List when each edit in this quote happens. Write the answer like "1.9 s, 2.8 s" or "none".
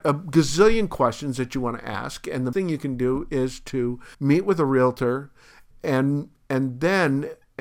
2.5 s, 4.1 s, 5.7 s